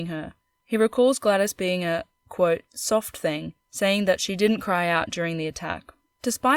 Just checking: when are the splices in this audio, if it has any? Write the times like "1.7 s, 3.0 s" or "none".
3.6 s